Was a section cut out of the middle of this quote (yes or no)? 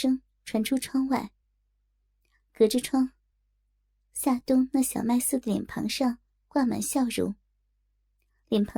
no